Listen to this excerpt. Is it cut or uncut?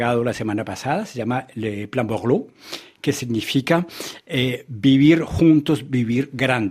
uncut